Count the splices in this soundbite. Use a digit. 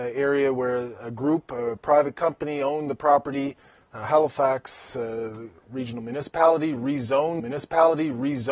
2